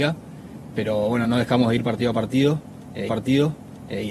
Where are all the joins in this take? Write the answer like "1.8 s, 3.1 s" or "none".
1.2 s, 3.1 s